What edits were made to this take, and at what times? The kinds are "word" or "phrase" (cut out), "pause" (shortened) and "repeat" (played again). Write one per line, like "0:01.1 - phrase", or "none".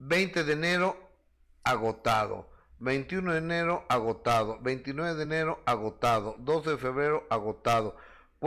none